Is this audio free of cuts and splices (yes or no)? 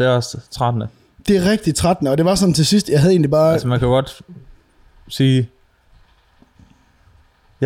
yes